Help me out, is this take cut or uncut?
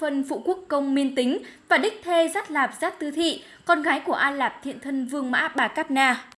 uncut